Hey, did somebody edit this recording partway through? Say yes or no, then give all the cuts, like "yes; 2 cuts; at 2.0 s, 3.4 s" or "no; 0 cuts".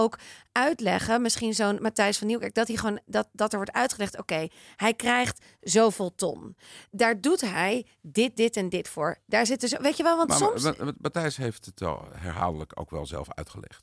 no; 0 cuts